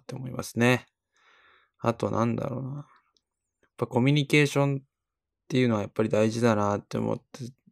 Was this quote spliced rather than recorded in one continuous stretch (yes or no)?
no